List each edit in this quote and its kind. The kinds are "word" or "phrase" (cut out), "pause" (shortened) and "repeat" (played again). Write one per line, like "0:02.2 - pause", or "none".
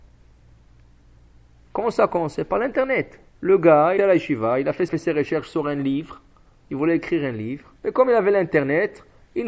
0:03.3 - pause
0:04.0 - word
0:04.9 - phrase
0:07.8 - pause